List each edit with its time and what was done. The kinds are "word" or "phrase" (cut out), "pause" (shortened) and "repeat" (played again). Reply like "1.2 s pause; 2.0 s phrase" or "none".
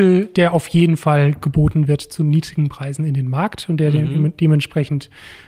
none